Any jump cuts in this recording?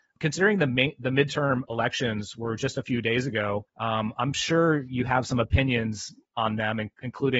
yes; 1 cut; at 3.7 s

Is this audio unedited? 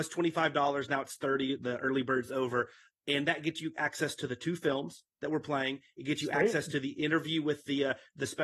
yes; 0 cuts

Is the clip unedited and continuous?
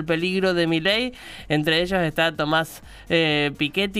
yes; 0 cuts

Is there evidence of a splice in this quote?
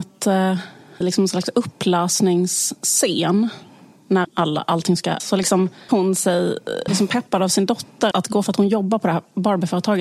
yes; 7 cuts; at 1.0 s, 4.2 s, 5.2 s, 5.9 s, 6.9 s, 8.1 s, 8.4 s

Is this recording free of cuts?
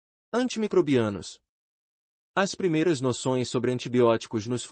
yes; 0 cuts

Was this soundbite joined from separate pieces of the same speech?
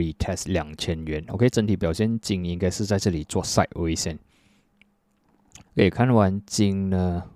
yes; 1 cut; at 5.7 s

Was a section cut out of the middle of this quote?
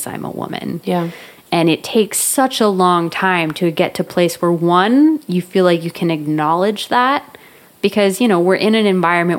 no; 0 cuts

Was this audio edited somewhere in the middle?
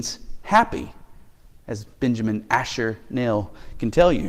no; 0 cuts

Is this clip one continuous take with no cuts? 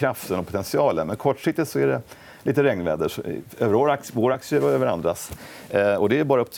yes; 0 cuts

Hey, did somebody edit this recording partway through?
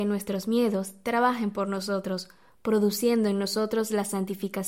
no; 0 cuts

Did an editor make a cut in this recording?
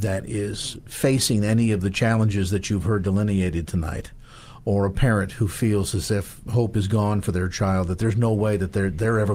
no; 0 cuts

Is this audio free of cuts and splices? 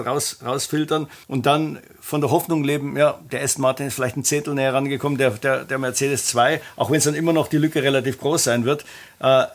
no; 1 cut; at 1.2 s

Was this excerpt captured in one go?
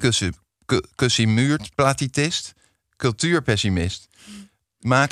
yes; 0 cuts

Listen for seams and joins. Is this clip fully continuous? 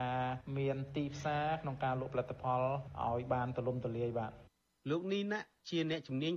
yes; 0 cuts

